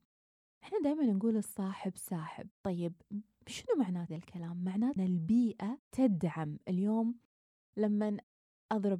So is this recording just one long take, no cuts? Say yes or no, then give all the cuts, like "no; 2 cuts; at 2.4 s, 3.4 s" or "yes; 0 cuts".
no; 4 cuts; at 2.6 s, 4.1 s, 5.0 s, 5.9 s